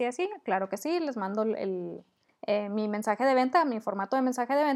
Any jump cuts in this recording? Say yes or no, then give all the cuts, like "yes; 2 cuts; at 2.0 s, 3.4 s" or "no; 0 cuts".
no; 0 cuts